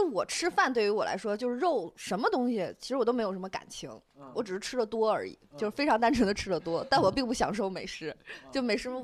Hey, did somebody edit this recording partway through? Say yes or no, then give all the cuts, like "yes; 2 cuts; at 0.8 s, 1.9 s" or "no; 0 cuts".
no; 0 cuts